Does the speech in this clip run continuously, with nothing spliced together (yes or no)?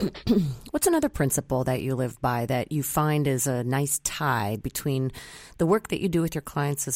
yes